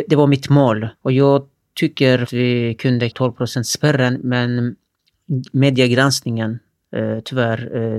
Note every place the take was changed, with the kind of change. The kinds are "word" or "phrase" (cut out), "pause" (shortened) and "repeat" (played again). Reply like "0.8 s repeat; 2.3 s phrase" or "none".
1.0 s pause; 2.3 s phrase; 3.1 s word